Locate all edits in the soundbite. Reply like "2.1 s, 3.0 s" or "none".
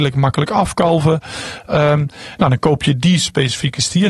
none